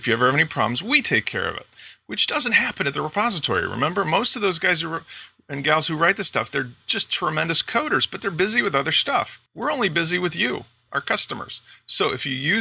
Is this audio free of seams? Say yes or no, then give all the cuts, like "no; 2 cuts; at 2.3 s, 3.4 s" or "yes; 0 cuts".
no; 1 cut; at 9.5 s